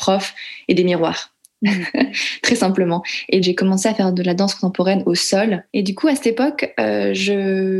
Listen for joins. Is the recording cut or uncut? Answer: cut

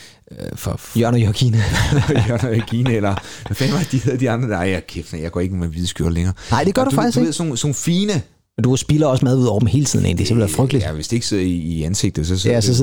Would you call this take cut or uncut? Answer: uncut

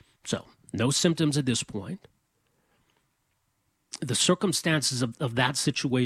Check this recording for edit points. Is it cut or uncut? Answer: uncut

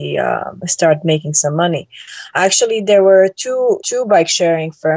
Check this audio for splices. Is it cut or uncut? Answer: uncut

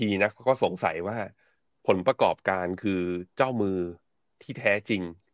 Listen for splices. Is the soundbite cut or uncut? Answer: uncut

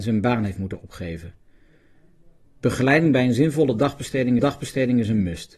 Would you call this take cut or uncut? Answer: cut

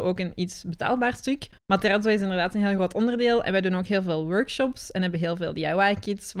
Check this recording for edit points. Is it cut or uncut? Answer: uncut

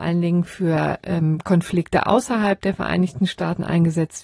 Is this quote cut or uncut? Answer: uncut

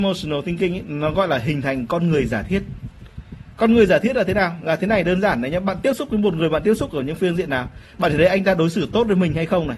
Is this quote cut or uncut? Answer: uncut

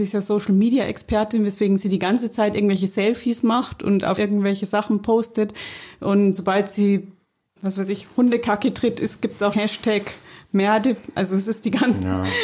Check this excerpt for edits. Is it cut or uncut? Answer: cut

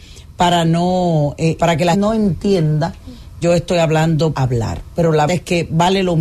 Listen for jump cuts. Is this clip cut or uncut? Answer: cut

